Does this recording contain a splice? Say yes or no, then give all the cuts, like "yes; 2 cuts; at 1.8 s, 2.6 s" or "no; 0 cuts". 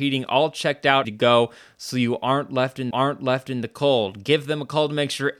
yes; 2 cuts; at 1.0 s, 2.9 s